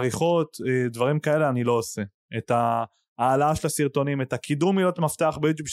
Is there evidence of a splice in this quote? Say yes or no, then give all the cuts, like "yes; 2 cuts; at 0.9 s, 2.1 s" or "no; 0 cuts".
no; 0 cuts